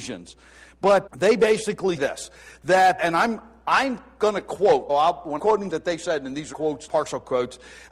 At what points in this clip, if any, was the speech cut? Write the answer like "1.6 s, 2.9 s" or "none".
1.1 s, 2.0 s, 3.0 s, 4.9 s, 5.4 s, 5.7 s, 6.5 s, 6.9 s